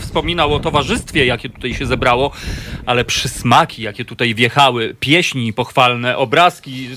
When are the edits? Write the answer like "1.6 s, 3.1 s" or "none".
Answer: none